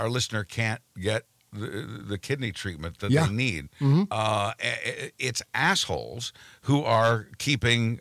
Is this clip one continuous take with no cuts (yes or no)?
yes